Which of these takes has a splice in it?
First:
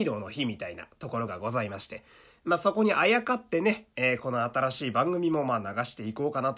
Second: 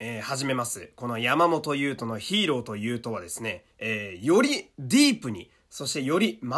second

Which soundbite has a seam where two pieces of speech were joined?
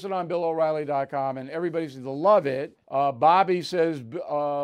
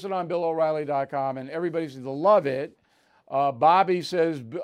first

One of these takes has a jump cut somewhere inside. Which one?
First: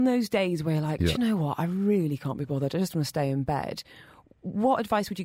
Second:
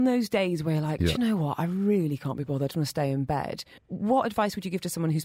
second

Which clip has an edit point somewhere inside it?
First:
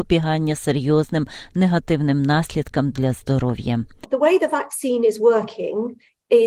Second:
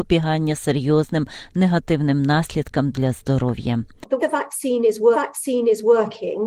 second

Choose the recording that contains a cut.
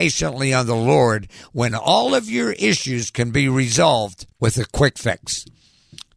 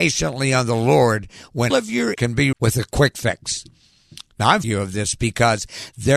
second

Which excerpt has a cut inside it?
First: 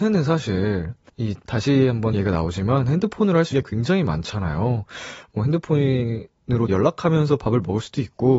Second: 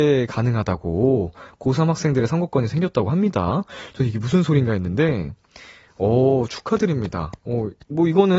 first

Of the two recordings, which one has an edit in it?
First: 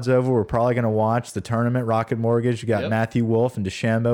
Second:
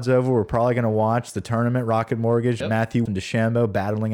second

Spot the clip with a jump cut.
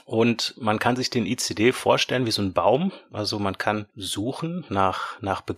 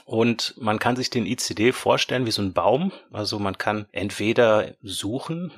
first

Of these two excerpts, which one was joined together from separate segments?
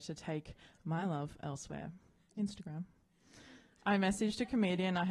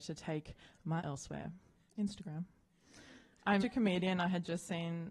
second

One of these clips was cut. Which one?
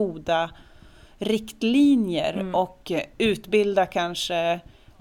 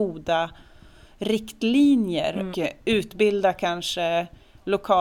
second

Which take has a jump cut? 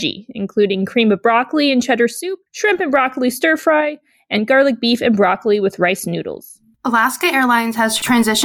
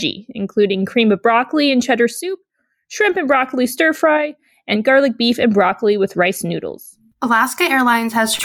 first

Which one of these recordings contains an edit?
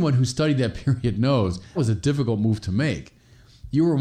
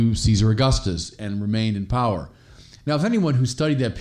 first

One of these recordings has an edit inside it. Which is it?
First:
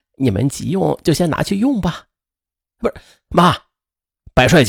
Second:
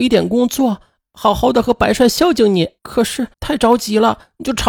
second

